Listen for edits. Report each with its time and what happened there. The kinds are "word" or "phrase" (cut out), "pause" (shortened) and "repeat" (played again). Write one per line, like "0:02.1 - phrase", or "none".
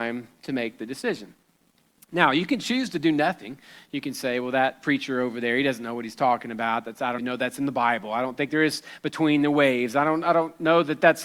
0:07.2 - word